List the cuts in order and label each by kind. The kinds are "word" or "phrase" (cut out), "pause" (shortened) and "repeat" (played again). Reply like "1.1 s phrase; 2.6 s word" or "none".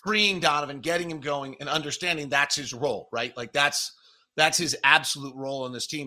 none

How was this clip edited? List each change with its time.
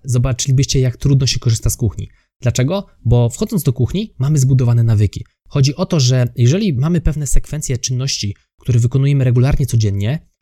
none

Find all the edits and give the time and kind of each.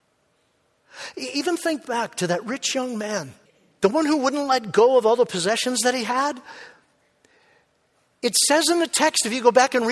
3.5 s pause

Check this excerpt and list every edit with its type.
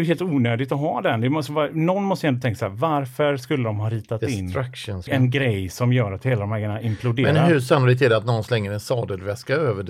5.1 s word

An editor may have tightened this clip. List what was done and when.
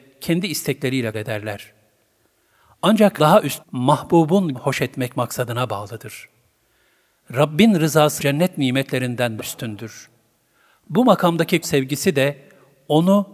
1.1 s word; 3.2 s word; 3.6 s word; 4.5 s word; 8.2 s word; 9.4 s word; 11.6 s word

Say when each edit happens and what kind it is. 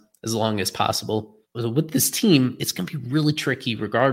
1.4 s pause

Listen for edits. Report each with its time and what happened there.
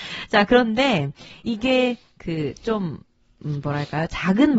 none

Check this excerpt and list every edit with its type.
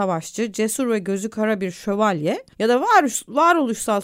2.5 s pause

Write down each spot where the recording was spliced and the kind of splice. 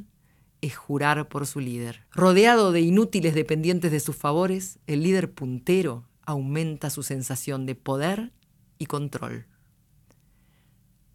2.1 s pause

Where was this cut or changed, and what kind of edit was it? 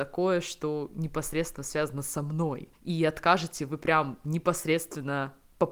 2.8 s pause

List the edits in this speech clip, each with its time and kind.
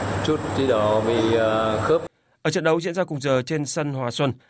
none

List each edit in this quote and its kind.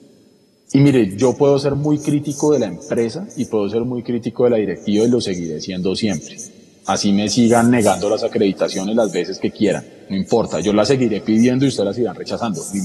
none

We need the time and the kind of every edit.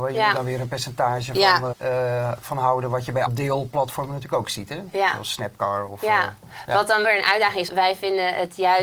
1.7 s word; 3.3 s word; 7.0 s word; 7.7 s word

